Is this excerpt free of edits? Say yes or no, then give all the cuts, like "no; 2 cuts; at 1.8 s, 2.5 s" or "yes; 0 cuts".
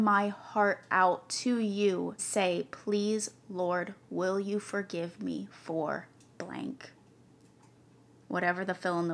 no; 1 cut; at 2.2 s